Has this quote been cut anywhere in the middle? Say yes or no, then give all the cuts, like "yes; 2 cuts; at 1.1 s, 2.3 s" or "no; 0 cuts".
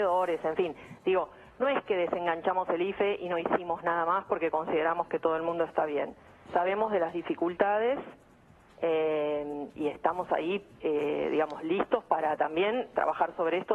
no; 0 cuts